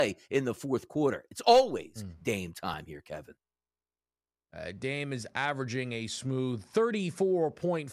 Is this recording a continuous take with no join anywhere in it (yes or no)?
yes